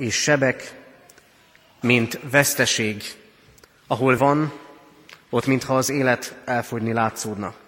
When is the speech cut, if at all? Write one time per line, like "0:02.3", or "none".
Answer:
0:04.2